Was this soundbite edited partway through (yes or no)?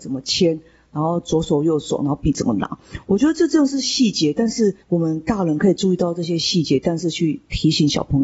yes